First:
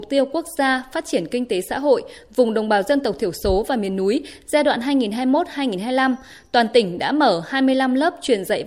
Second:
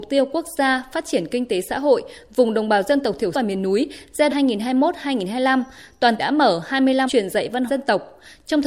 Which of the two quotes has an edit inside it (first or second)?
second